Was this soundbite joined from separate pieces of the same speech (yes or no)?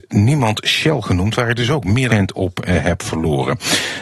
yes